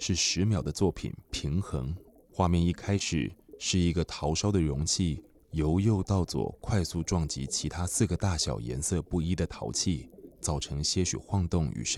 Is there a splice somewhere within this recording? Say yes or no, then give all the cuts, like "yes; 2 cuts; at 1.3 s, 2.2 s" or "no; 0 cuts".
yes; 3 cuts; at 1.3 s, 2.1 s, 10.3 s